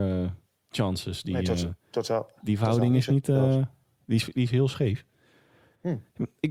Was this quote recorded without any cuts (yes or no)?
yes